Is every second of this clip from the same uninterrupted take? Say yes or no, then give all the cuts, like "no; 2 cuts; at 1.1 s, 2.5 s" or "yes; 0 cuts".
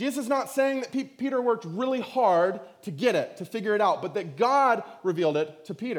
yes; 0 cuts